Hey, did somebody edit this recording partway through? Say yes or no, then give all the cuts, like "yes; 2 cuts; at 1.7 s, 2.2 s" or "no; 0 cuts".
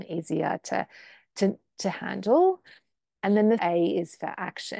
yes; 1 cut; at 3.6 s